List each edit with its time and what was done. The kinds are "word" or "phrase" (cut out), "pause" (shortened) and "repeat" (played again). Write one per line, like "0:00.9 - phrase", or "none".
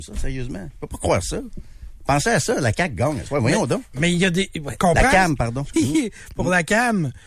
0:04.8 - word
0:05.7 - phrase